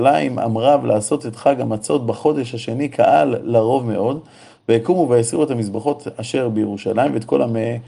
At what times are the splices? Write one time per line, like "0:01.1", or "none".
none